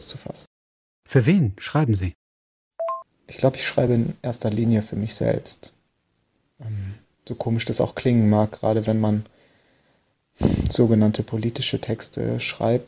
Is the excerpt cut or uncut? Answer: uncut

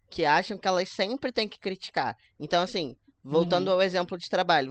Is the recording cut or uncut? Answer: uncut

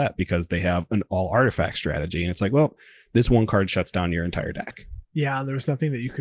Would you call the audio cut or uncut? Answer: uncut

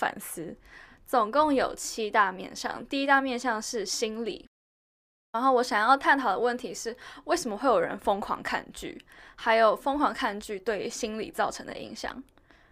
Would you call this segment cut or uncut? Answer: uncut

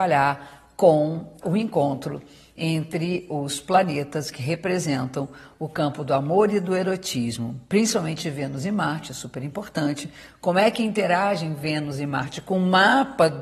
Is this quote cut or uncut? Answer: cut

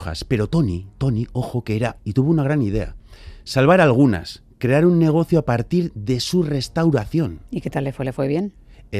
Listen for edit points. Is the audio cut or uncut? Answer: cut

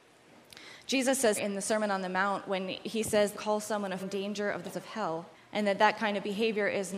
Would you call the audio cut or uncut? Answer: cut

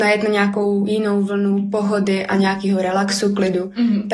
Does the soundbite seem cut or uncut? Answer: uncut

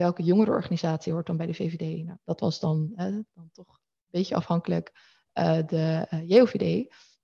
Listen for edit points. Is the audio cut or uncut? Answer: uncut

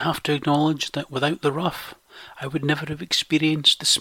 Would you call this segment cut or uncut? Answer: uncut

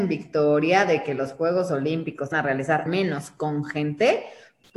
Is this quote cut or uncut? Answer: cut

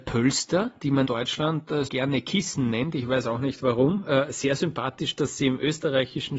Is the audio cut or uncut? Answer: cut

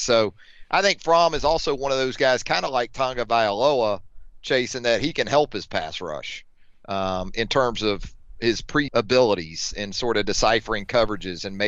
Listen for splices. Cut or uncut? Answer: cut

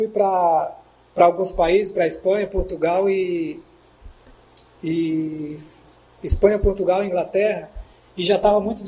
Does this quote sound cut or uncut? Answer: uncut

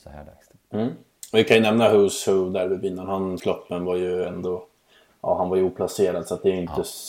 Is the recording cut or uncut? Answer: cut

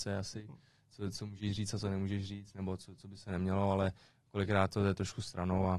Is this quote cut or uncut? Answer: uncut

